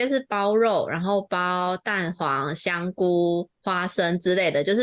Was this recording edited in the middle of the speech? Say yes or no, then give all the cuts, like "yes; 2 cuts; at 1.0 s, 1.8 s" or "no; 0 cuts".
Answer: yes; 1 cut; at 3.6 s